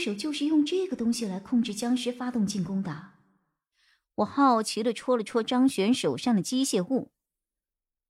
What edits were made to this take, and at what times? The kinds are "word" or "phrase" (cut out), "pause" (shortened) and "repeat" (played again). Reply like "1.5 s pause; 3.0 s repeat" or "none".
none

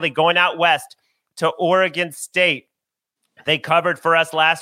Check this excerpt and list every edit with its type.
none

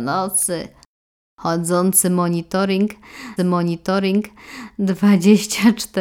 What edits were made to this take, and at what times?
3.4 s repeat

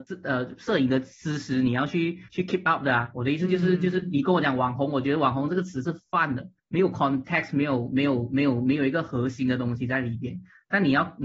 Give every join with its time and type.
2.3 s pause; 6.6 s pause

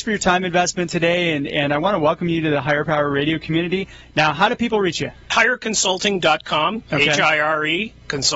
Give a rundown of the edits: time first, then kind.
none

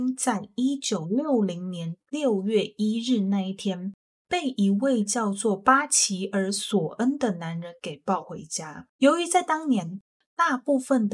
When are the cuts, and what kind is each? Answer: 8.9 s pause

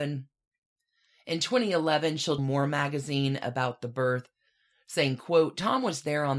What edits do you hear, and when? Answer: 2.4 s word

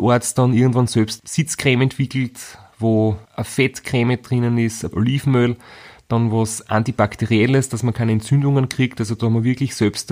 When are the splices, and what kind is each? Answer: 3.2 s pause; 4.9 s word

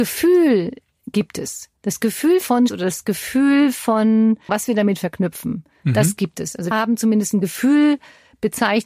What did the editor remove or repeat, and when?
1.8 s pause; 2.7 s word; 4.5 s word; 6.7 s word

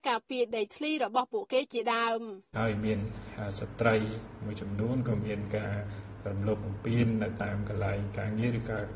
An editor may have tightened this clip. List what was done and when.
2.5 s pause

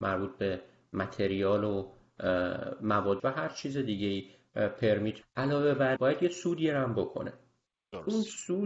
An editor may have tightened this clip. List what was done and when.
3.2 s phrase; 5.2 s phrase; 6.0 s word

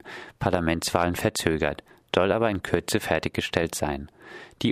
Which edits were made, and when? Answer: none

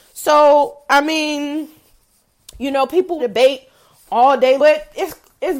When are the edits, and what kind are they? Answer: 3.2 s word; 4.6 s word

